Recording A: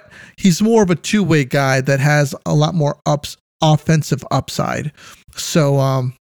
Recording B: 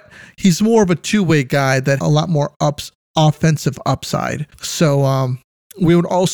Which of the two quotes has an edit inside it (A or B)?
B